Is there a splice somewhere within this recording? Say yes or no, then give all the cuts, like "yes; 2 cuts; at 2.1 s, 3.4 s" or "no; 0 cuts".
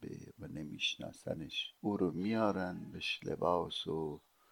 yes; 1 cut; at 1.8 s